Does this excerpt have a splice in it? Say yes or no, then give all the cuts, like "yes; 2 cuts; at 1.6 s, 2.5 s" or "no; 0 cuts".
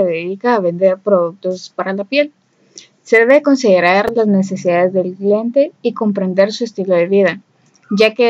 no; 0 cuts